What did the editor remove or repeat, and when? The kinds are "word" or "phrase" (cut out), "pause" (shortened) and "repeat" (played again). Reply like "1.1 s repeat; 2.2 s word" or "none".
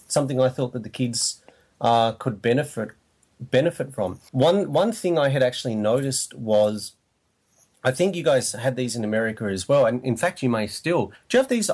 none